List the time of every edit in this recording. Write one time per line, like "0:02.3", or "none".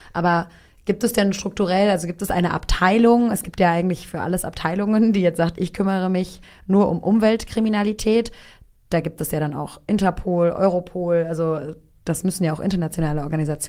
none